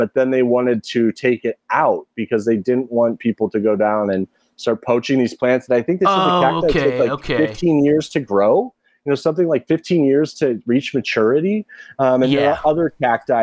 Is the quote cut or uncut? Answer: uncut